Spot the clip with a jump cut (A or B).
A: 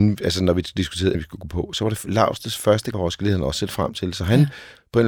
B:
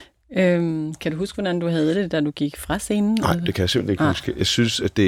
A